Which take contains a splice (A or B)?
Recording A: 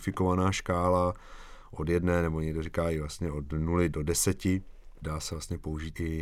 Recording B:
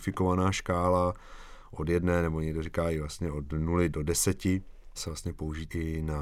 B